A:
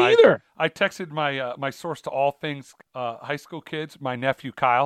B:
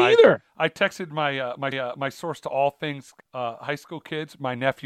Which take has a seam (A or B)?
B